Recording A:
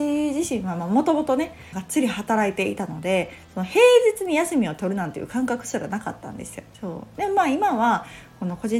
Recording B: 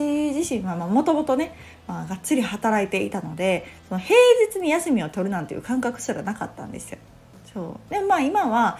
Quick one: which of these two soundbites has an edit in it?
A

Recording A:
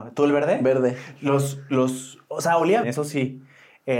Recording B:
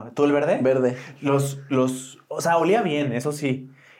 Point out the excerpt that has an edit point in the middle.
A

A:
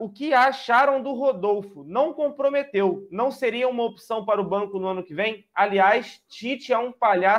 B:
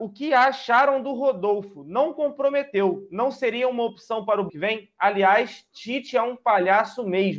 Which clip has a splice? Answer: B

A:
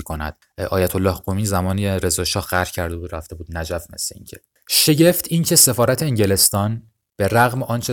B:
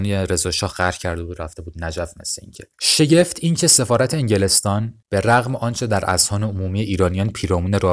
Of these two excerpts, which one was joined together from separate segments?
B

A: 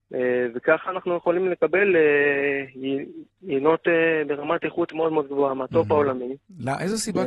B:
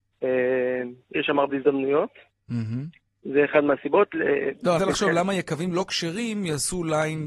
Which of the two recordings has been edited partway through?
B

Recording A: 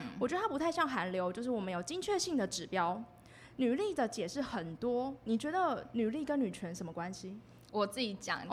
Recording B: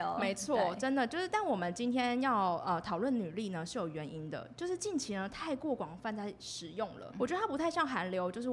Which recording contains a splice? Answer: B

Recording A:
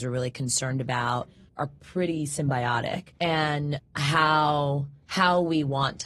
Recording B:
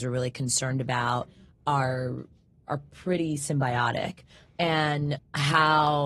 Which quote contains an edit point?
A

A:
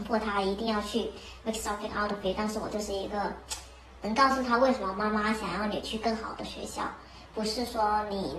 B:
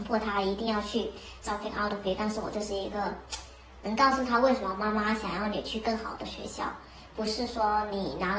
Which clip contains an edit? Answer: B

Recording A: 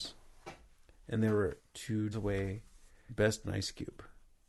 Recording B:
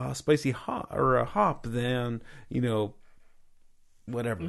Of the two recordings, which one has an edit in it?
A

